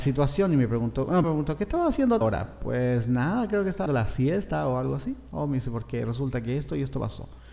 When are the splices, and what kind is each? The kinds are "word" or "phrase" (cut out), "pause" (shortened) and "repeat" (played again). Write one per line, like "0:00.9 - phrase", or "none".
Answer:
0:01.2 - word
0:02.2 - word
0:03.9 - word